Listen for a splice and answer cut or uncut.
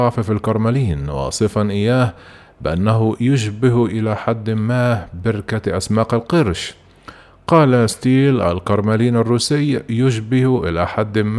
uncut